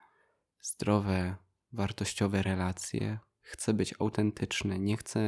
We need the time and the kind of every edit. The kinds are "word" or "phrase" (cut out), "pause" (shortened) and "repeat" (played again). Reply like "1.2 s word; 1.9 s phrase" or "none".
none